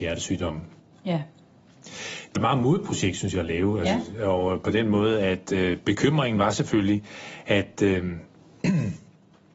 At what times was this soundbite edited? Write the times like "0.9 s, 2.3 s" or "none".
2.4 s